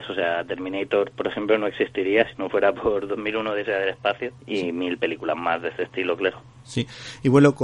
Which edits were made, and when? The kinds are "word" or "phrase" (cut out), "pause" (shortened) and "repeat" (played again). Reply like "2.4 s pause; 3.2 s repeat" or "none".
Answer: 4.4 s pause

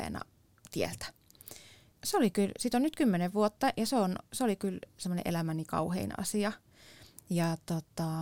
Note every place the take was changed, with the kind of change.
none

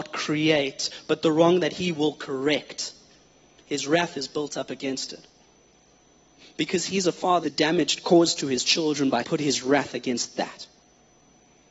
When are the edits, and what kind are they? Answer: 7.4 s phrase; 9.2 s phrase

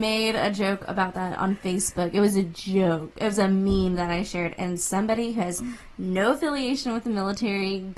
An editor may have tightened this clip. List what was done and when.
none

